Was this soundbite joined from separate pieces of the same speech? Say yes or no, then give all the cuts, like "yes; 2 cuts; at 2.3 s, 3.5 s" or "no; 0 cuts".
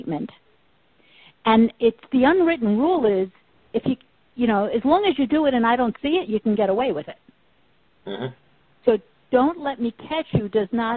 no; 0 cuts